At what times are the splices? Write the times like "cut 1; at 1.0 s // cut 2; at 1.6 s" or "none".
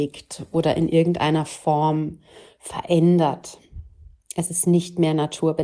none